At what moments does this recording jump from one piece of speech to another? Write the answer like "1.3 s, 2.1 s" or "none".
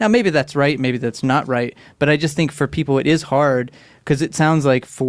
none